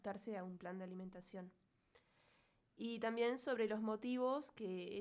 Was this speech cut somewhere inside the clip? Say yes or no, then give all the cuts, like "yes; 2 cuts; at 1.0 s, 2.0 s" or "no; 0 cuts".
no; 0 cuts